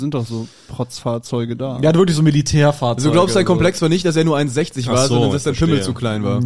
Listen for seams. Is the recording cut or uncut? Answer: uncut